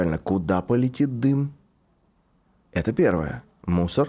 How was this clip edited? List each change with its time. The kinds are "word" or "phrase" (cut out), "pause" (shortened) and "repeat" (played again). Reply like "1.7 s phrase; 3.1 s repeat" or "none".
none